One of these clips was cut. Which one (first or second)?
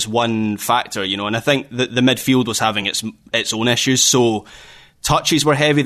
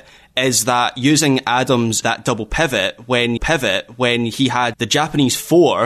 second